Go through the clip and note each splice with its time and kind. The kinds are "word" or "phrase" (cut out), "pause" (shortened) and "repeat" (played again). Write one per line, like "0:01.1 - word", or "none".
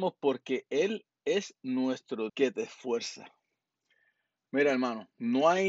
0:01.1 - pause
0:02.3 - word